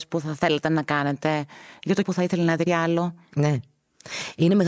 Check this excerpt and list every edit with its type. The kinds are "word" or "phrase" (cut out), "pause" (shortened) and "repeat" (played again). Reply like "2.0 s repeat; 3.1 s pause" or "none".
2.0 s word; 2.7 s word

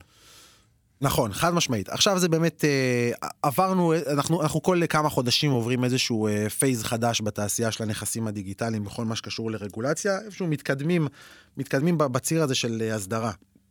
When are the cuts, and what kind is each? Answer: none

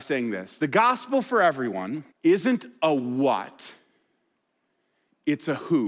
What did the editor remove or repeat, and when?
2.1 s pause

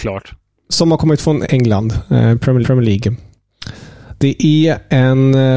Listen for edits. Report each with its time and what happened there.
2.6 s repeat

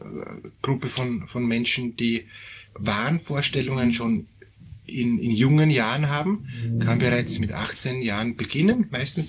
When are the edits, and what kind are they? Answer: 2.7 s pause; 7.4 s word

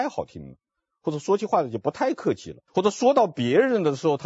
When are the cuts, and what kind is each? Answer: 2.7 s pause

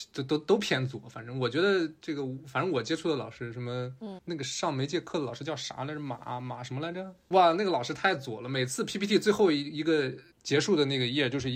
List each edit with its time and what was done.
10.3 s pause

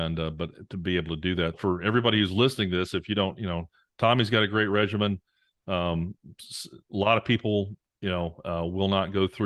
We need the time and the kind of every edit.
1.5 s word

